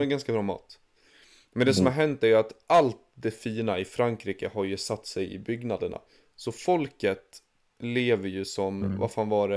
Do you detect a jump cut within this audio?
no; 0 cuts

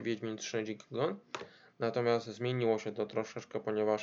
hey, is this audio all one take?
yes; 0 cuts

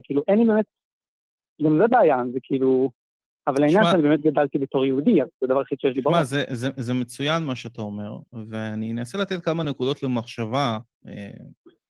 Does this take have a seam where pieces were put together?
no; 0 cuts

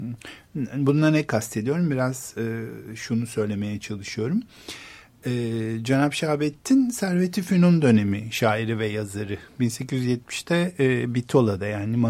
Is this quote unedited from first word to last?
yes; 0 cuts

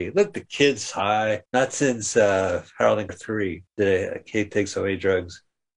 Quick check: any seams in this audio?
yes; 3 cuts; at 1.5 s, 3.1 s, 3.7 s

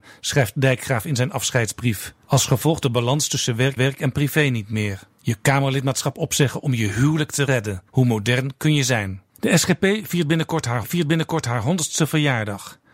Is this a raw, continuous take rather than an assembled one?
no; 7 cuts; at 2.2 s, 2.8 s, 3.8 s, 5.1 s, 7.9 s, 9.3 s, 10.8 s

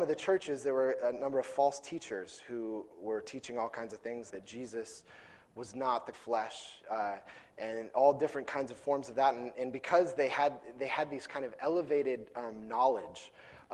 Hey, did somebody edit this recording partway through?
yes; 2 cuts; at 4.3 s, 6.1 s

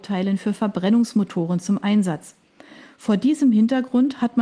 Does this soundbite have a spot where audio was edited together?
no; 0 cuts

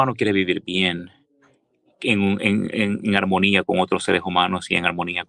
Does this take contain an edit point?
no; 0 cuts

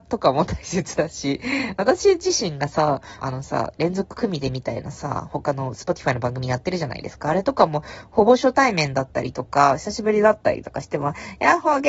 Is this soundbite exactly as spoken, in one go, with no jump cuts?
no; 1 cut; at 3.2 s

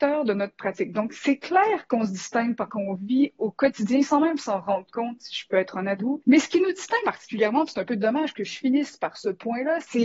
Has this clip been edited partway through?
yes; 3 cuts; at 2.7 s, 6.0 s, 7.0 s

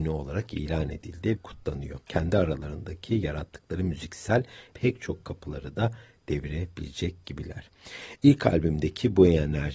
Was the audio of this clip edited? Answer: yes; 3 cuts; at 1.4 s, 2.0 s, 4.7 s

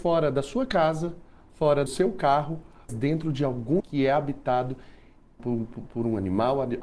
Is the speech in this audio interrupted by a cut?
yes; 4 cuts; at 1.9 s, 2.9 s, 3.8 s, 5.4 s

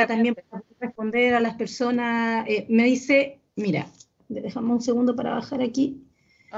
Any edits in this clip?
no; 0 cuts

